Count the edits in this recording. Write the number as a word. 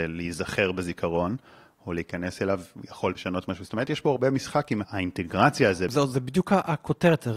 one